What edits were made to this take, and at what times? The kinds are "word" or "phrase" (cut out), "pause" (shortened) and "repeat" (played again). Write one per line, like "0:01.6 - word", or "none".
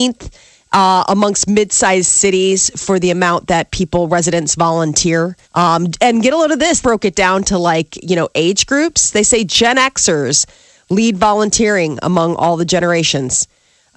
0:05.4 - pause
0:06.8 - phrase